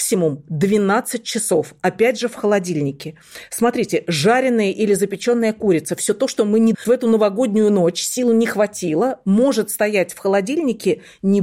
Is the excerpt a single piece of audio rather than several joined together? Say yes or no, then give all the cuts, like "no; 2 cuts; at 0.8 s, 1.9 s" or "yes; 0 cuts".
no; 1 cut; at 6.7 s